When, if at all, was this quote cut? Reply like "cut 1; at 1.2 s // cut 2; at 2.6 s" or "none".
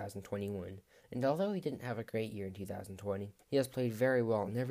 cut 1; at 3.4 s